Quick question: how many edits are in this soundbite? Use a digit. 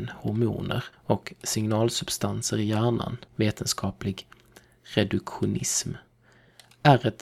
2